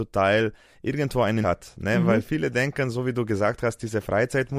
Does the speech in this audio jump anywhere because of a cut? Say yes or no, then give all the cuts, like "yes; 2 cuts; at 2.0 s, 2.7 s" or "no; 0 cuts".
yes; 1 cut; at 1.4 s